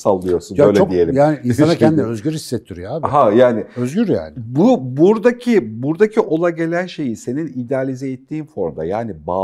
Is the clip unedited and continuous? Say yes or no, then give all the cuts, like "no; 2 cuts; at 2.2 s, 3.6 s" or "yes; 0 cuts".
yes; 0 cuts